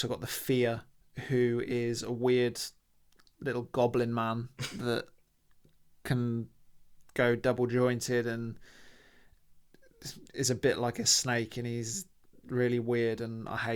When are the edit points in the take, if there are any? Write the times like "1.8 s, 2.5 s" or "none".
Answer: none